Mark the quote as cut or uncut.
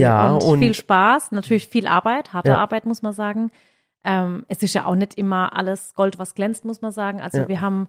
uncut